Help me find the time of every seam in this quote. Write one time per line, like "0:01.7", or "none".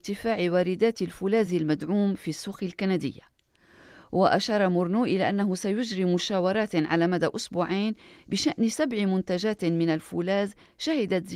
none